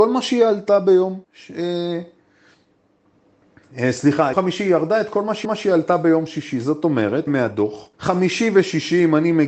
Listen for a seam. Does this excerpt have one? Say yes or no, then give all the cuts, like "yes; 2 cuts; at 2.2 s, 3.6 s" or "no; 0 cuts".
yes; 5 cuts; at 1.2 s, 4.3 s, 5.4 s, 7.3 s, 7.9 s